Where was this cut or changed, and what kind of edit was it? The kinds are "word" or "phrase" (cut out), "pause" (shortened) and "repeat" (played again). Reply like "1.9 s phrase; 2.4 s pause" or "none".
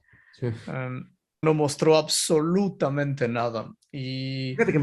1.4 s word